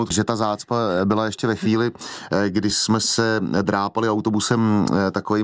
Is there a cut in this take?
no; 0 cuts

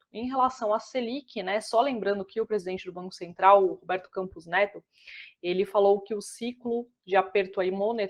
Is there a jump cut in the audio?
no; 0 cuts

